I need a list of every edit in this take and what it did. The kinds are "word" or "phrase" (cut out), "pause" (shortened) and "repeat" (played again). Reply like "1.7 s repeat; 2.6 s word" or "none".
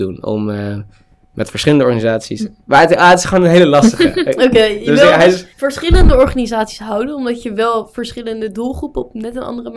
5.5 s pause